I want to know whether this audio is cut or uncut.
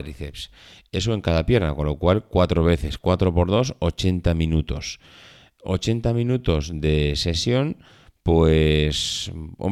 uncut